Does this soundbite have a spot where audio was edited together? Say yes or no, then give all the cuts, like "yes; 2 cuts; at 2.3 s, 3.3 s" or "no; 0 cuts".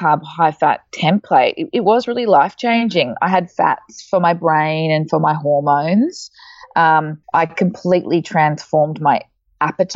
yes; 1 cut; at 7.2 s